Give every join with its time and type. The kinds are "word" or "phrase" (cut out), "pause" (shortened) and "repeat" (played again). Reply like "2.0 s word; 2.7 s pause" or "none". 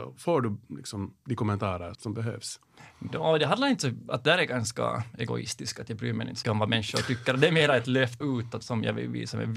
1.9 s word; 6.4 s word; 8.2 s word; 8.6 s word